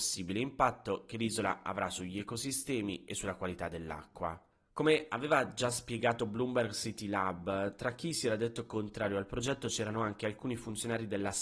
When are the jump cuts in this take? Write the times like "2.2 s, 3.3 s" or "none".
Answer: 4.5 s